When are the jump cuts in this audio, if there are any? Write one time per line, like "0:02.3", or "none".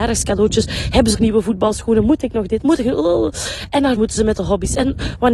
0:01.1
0:04.0